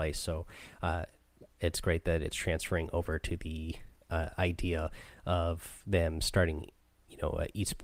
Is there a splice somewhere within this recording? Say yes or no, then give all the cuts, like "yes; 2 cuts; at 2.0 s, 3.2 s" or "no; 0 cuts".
no; 0 cuts